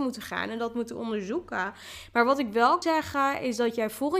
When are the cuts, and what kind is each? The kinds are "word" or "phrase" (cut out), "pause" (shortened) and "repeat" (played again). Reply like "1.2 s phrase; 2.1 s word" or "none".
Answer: 2.8 s word